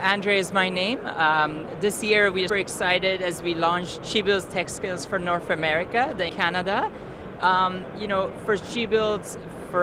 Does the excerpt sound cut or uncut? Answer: cut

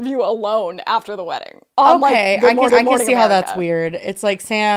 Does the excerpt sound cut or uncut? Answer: cut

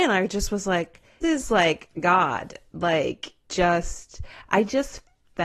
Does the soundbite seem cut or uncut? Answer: cut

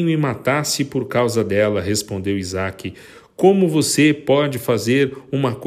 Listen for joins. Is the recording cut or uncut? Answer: uncut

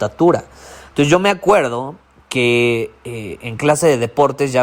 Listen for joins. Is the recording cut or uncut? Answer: uncut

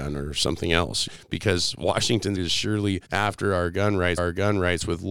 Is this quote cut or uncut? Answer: cut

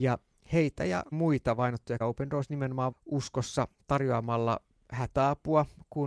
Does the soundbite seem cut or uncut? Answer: cut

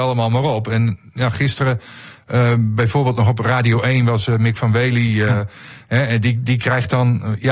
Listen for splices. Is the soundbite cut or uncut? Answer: uncut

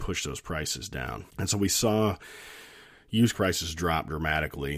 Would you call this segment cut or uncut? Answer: cut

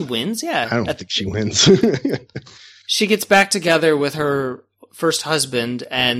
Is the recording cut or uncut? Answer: uncut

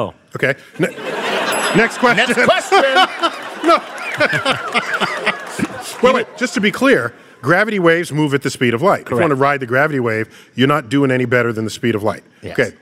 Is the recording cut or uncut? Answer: uncut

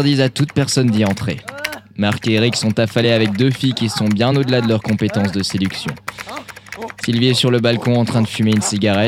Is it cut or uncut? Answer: uncut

